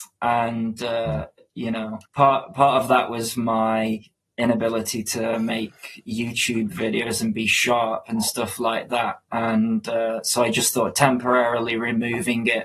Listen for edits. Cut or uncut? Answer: cut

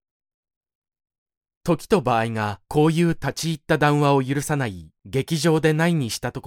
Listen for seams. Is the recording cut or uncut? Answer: cut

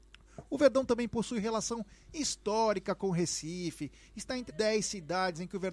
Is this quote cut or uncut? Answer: cut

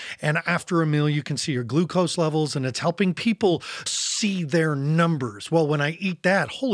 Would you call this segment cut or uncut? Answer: cut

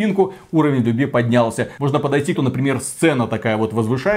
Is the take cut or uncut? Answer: cut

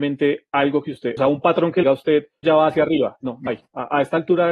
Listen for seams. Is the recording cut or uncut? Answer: cut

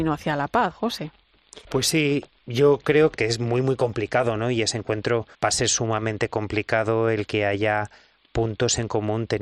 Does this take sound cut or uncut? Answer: cut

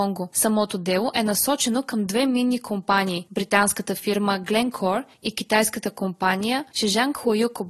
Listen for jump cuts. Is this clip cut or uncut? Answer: uncut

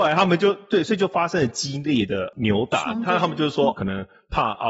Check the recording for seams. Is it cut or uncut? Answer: cut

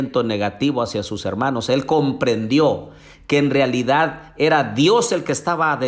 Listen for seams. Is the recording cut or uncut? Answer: uncut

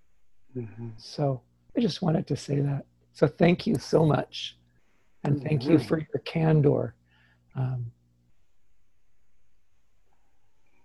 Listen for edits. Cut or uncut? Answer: uncut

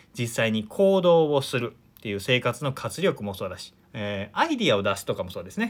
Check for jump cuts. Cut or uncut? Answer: cut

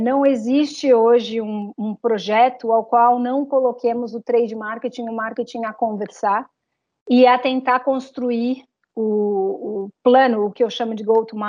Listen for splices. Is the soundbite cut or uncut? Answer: uncut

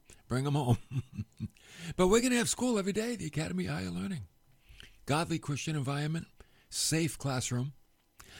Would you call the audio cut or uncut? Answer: uncut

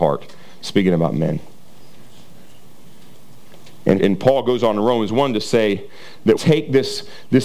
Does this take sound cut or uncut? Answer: cut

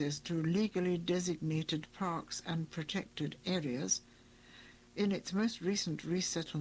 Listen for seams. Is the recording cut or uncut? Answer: uncut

